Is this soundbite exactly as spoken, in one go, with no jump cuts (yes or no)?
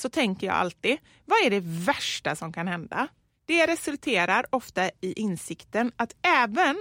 yes